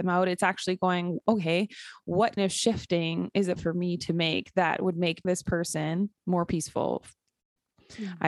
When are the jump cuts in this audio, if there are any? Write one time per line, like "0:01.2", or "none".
0:02.4
0:03.6
0:05.2
0:06.2